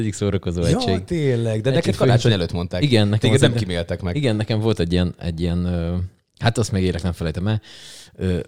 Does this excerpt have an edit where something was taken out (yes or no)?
no